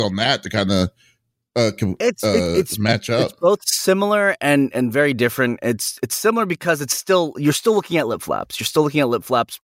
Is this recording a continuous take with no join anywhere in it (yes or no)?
yes